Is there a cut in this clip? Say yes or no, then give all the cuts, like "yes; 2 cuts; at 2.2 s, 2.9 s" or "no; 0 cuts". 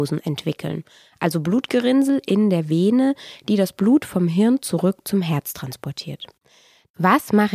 no; 0 cuts